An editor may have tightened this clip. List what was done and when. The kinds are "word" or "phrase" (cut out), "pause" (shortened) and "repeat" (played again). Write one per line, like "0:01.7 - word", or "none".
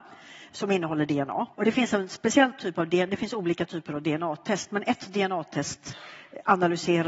0:01.5 - pause